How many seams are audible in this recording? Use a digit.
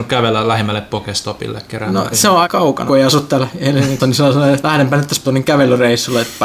6